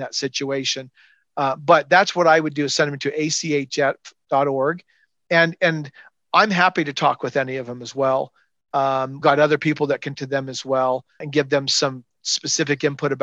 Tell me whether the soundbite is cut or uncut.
cut